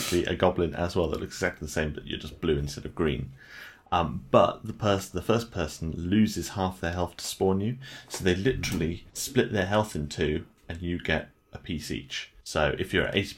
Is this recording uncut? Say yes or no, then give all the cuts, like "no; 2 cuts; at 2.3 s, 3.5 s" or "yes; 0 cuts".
no; 2 cuts; at 9.1 s, 12.4 s